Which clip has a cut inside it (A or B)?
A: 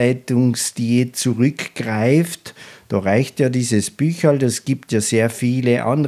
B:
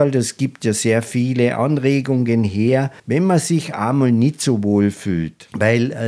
B